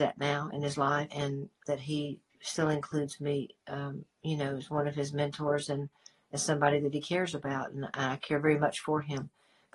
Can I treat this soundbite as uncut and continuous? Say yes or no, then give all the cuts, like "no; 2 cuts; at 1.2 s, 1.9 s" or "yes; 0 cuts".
no; 4 cuts; at 1.1 s, 1.6 s, 2.3 s, 4.1 s